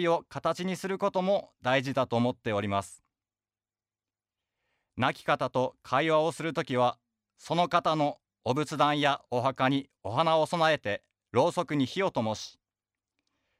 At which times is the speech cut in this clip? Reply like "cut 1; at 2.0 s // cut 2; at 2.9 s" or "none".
cut 1; at 11.2 s

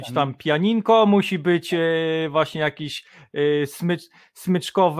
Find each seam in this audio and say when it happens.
none

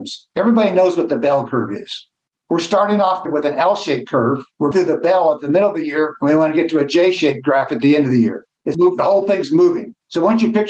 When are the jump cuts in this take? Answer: cut 1; at 3.3 s // cut 2; at 4.7 s // cut 3; at 8.7 s

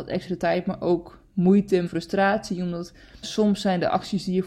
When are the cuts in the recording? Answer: cut 1; at 1.9 s // cut 2; at 3.2 s

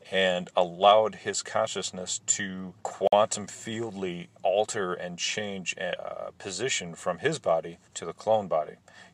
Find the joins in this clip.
cut 1; at 2.8 s // cut 2; at 4.4 s // cut 3; at 7.9 s

